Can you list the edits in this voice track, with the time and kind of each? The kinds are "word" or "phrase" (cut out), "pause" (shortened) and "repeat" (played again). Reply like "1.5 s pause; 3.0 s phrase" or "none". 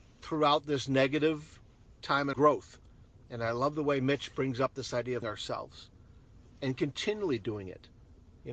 2.3 s phrase; 5.2 s word